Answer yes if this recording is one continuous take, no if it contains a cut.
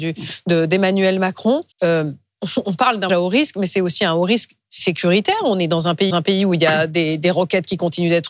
no